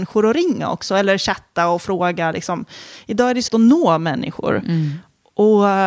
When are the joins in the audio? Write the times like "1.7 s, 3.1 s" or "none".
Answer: 3.5 s